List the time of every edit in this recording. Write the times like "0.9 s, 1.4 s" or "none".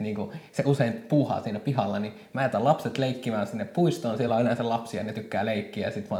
none